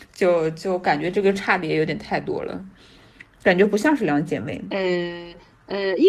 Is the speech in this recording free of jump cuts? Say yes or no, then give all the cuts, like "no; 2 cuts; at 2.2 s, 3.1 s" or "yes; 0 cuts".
yes; 0 cuts